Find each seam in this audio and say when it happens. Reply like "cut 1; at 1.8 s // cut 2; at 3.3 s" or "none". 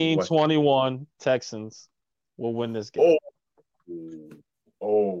none